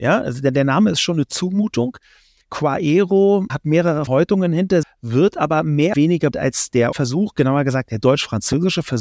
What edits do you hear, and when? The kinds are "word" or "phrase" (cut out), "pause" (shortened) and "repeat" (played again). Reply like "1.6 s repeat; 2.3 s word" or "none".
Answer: 3.5 s word; 4.1 s word; 4.8 s word; 5.9 s word; 6.3 s word; 6.9 s word